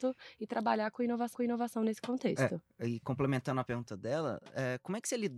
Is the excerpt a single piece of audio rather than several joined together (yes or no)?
no